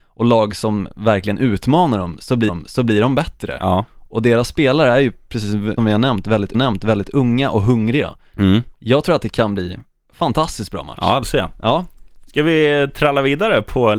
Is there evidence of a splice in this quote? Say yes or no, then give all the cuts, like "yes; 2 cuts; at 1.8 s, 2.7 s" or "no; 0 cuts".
yes; 4 cuts; at 2.5 s, 5.8 s, 6.5 s, 11.2 s